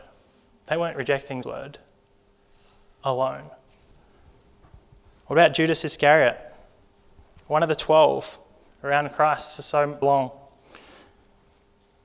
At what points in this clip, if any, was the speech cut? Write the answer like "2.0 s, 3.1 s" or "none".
1.4 s, 10.0 s